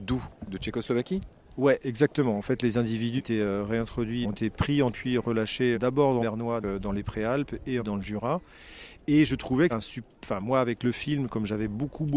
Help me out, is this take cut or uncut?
cut